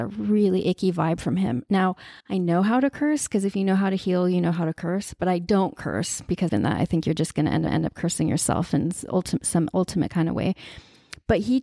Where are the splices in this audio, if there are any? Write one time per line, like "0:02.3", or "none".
0:02.2
0:06.5
0:07.7